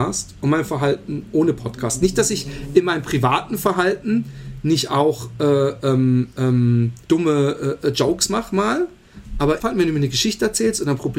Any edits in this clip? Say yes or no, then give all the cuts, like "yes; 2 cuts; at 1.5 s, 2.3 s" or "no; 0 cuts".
yes; 2 cuts; at 7.0 s, 9.6 s